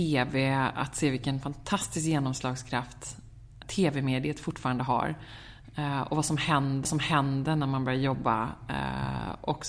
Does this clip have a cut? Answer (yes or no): yes